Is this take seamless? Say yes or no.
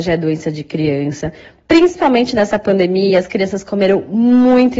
yes